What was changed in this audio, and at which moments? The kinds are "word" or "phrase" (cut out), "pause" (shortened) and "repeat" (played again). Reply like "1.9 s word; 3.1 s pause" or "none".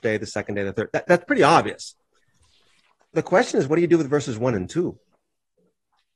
none